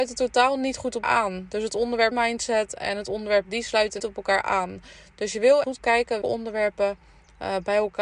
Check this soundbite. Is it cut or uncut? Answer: cut